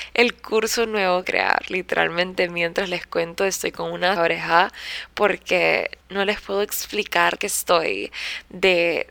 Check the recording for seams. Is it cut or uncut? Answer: cut